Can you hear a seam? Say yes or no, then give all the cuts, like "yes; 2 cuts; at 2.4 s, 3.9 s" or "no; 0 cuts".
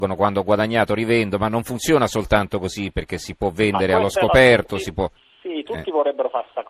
yes; 1 cut; at 5.2 s